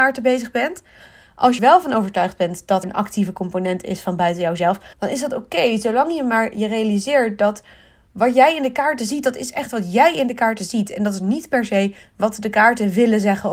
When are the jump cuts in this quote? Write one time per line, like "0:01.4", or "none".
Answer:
0:01.6
0:02.8
0:04.9